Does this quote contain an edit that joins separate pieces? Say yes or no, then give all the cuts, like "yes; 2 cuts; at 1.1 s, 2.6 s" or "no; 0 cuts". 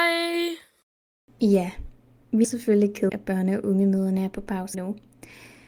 yes; 3 cuts; at 2.4 s, 3.1 s, 4.7 s